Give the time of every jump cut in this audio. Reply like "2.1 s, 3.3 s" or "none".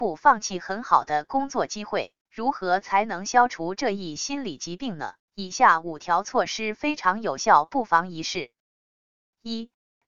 2.2 s, 5.2 s